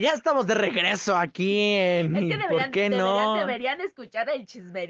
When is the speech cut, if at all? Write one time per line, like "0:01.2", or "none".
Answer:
none